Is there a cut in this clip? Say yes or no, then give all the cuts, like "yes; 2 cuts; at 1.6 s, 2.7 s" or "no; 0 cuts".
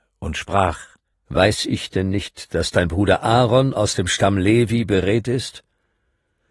yes; 1 cut; at 1.1 s